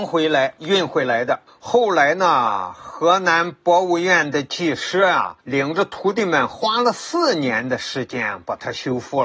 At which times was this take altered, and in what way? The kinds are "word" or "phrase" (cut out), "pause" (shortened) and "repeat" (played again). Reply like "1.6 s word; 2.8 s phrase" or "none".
1.5 s pause; 5.4 s pause